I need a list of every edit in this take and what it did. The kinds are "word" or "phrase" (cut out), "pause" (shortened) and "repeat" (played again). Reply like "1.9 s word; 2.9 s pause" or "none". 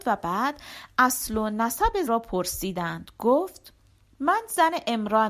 2.1 s word